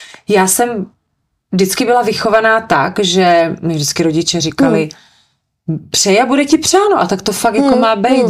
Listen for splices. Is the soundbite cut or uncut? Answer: uncut